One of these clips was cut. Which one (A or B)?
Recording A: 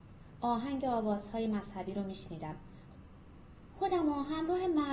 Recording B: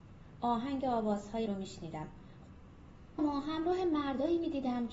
B